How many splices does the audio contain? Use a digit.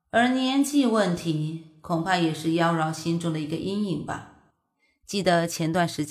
0